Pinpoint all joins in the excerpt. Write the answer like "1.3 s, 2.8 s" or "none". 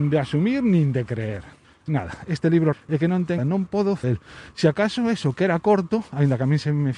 1.6 s, 2.7 s, 3.4 s, 4.0 s